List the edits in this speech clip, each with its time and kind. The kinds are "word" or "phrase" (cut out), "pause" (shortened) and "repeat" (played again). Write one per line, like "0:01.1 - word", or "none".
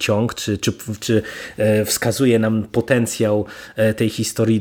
none